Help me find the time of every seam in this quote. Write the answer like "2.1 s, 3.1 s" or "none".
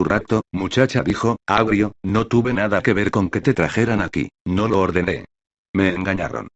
4.4 s